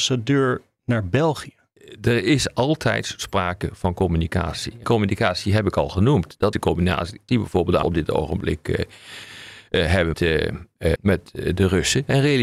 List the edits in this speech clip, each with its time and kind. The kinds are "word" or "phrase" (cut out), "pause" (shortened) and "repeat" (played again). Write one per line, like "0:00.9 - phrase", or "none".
0:04.8 - word
0:06.5 - word
0:07.3 - word
0:07.8 - word
0:10.1 - word
0:11.0 - word